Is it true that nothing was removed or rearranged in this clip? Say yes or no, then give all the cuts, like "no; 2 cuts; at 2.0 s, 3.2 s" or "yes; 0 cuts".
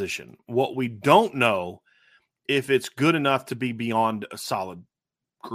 yes; 0 cuts